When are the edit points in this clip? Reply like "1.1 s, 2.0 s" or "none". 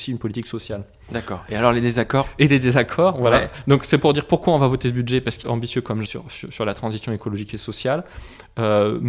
5.4 s, 6.1 s